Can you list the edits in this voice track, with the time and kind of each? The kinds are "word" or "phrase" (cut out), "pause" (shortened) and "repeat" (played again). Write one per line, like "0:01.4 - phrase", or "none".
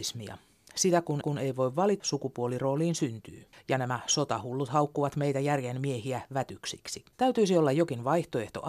0:01.2 - repeat
0:02.0 - word
0:03.5 - pause
0:07.1 - pause